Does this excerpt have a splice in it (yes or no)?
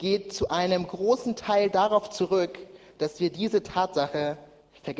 no